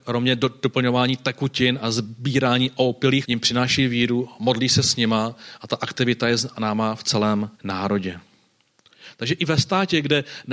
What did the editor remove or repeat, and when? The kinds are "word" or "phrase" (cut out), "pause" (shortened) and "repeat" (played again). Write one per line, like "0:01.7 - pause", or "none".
0:03.2 - word
0:07.5 - pause